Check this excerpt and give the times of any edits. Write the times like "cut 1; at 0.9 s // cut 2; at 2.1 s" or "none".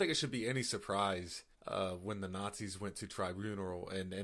cut 1; at 1.5 s